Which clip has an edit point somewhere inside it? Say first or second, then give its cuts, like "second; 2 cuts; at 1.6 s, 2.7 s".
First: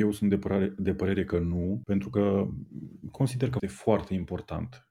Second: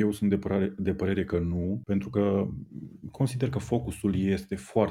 first; 1 cut; at 3.6 s